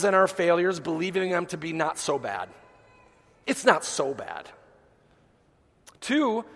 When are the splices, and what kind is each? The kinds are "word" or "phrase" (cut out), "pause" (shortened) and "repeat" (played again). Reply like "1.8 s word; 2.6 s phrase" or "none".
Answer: none